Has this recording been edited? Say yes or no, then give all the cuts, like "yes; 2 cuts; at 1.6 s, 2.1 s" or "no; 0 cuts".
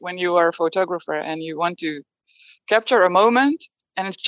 no; 0 cuts